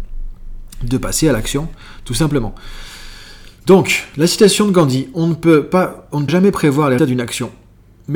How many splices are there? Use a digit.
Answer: 3